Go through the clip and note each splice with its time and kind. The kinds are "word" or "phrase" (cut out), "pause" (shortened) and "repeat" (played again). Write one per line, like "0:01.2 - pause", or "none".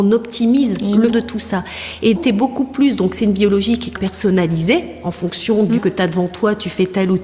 0:01.1 - word
0:02.1 - word
0:03.9 - word
0:05.8 - word